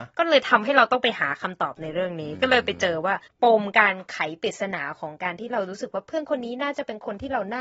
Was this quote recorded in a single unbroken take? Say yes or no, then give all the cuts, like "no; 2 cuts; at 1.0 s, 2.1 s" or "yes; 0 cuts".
no; 1 cut; at 3.3 s